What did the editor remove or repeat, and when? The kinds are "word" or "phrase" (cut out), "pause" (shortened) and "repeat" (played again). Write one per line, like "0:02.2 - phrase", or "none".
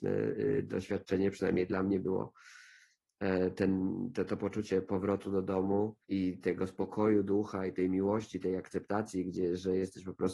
0:06.0 - pause